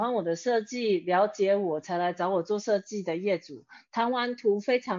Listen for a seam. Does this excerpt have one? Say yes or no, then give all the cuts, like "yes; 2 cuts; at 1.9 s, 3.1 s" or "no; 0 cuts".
no; 0 cuts